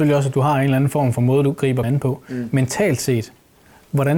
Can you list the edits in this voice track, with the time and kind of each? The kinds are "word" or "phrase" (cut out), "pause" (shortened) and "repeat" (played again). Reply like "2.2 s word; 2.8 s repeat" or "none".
1.8 s word